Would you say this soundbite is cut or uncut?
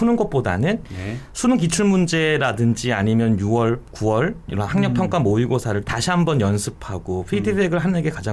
cut